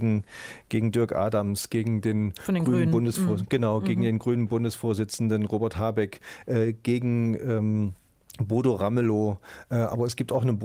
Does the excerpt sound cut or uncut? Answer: uncut